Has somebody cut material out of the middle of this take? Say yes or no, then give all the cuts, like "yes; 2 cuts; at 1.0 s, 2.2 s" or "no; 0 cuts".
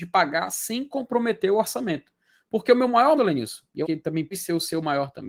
yes; 3 cuts; at 3.2 s, 3.8 s, 4.3 s